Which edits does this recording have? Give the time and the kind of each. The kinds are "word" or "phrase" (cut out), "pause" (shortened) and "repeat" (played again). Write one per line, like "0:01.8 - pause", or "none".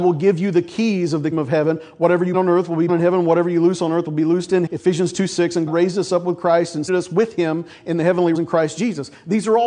0:01.3 - word
0:02.3 - word
0:02.9 - word
0:04.7 - word
0:05.7 - word
0:06.9 - word
0:08.3 - word

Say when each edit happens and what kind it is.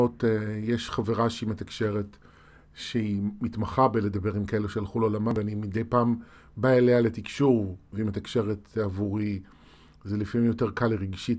none

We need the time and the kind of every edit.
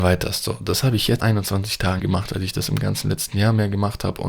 0:01.2 - word
0:02.0 - word

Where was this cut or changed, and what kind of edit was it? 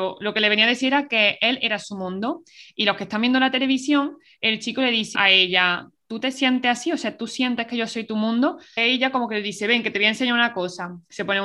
0:05.2 - word
0:08.8 - word

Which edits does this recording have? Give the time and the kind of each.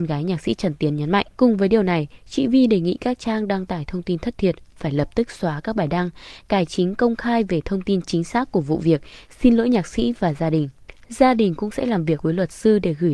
0:01.3 - pause

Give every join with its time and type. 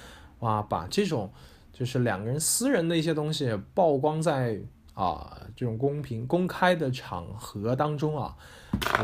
none

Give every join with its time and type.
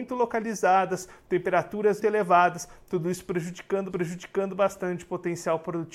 0:02.0 - word
0:03.9 - repeat

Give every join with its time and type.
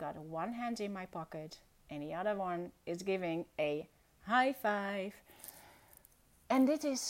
none

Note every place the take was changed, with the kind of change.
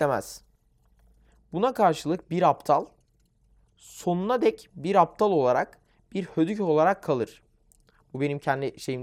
none

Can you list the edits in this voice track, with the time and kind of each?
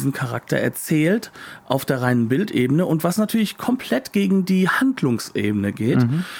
none

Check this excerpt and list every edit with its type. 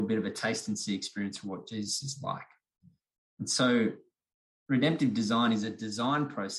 none

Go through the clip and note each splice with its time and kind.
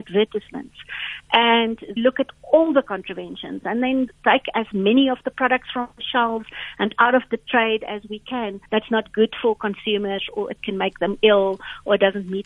0:02.0 - phrase
0:04.1 - word
0:08.7 - pause

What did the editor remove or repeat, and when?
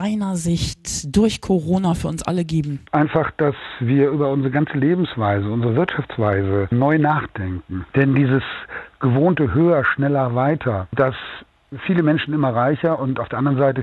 none

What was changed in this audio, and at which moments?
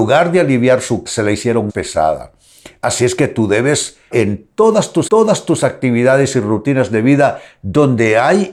0:01.1 - word
0:01.7 - word
0:04.1 - word
0:05.1 - repeat

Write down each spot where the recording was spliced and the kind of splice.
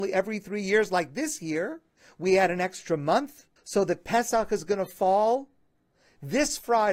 0:02.0 - pause
0:03.6 - pause

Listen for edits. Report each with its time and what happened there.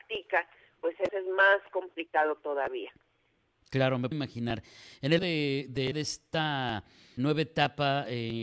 0:01.1 - word
0:04.1 - word
0:05.2 - word
0:05.9 - word
0:07.2 - word

